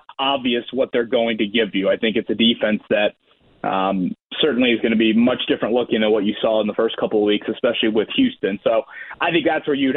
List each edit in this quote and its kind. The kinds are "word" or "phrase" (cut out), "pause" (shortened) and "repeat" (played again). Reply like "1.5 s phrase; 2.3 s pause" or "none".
none